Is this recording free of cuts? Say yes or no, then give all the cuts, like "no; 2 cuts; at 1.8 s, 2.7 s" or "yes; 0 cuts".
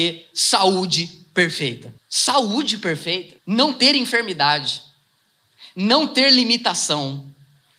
no; 2 cuts; at 2.0 s, 3.4 s